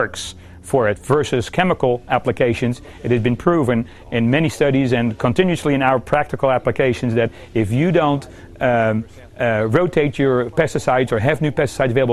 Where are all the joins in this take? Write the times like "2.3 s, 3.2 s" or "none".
none

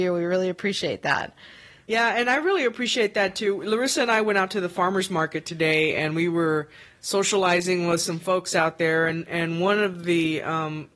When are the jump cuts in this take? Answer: none

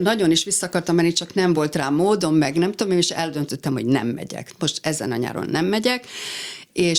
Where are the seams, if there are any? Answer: none

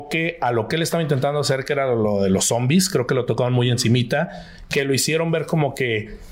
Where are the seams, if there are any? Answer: none

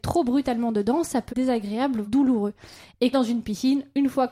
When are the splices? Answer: 1.3 s, 2.0 s, 3.1 s

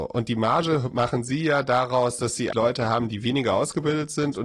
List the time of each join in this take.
2.5 s

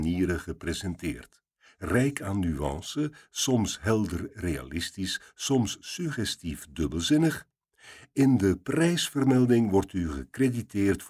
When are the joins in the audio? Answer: none

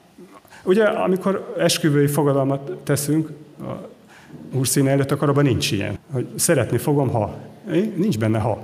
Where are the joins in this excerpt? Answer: 6.0 s

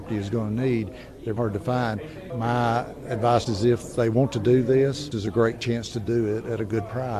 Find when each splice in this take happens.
1.4 s, 3.5 s, 5.1 s

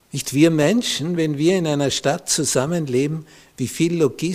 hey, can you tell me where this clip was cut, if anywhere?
none

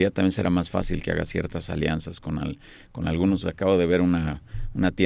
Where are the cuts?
none

